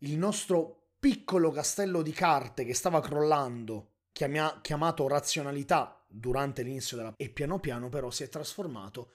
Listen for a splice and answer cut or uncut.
cut